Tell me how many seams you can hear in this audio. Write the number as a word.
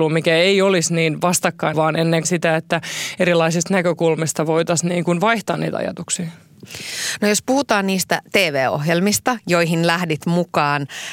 two